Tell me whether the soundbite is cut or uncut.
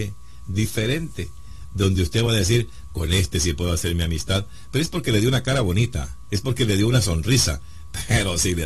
uncut